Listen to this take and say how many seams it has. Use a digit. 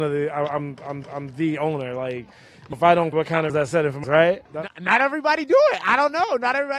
6